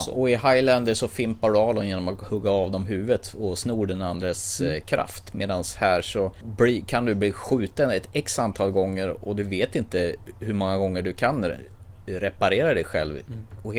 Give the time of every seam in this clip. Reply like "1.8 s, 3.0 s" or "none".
none